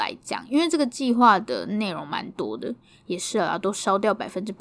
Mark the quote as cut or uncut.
uncut